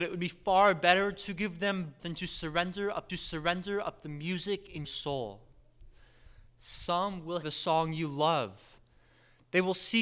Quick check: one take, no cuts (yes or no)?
no